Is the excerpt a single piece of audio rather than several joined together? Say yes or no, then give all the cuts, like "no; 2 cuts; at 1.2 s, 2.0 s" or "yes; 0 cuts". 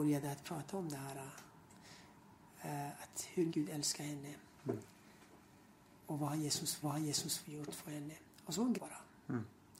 no; 3 cuts; at 3.5 s, 6.8 s, 8.7 s